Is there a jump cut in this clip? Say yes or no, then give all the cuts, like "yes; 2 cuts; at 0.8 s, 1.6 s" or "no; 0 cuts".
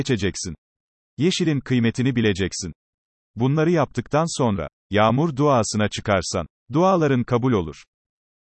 no; 0 cuts